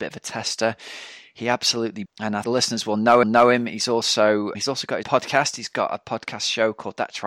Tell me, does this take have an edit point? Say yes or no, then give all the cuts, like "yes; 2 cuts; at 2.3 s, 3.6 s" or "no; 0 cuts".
yes; 5 cuts; at 2.1 s, 2.4 s, 3.2 s, 4.5 s, 5.0 s